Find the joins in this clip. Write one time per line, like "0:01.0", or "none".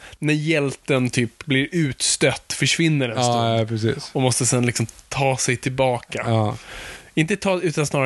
none

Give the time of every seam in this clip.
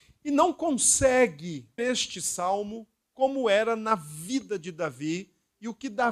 0:01.8

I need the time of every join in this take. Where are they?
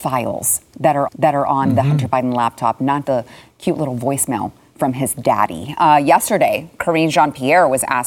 0:01.1
0:03.0

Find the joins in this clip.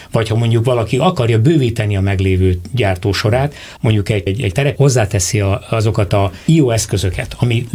0:03.8
0:04.3
0:04.8

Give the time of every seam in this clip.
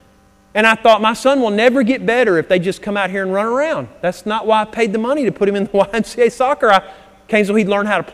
none

